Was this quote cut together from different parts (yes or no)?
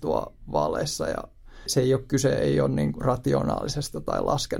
yes